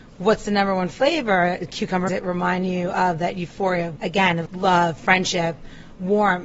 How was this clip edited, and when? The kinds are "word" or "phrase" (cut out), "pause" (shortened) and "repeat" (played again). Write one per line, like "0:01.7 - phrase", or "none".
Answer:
0:02.1 - phrase
0:04.0 - word
0:04.5 - word